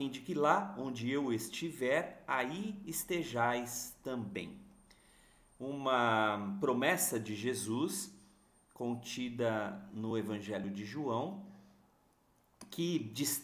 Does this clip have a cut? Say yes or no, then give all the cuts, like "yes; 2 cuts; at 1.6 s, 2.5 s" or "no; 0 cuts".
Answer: no; 0 cuts